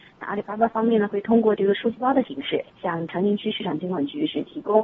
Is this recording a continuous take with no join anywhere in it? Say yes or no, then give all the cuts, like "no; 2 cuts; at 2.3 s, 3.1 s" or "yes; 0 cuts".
no; 1 cut; at 2.7 s